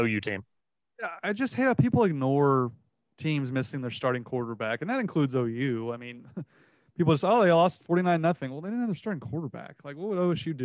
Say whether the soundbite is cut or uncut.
uncut